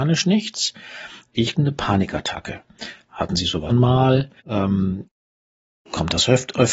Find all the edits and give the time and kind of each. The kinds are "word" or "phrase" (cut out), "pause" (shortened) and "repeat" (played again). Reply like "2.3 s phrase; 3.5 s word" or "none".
1.5 s phrase; 3.7 s word; 4.4 s pause